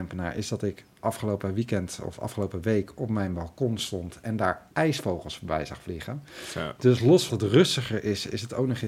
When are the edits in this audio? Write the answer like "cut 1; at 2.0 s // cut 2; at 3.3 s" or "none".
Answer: cut 1; at 4.7 s // cut 2; at 7.3 s